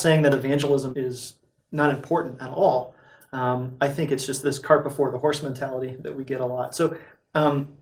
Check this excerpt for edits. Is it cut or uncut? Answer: cut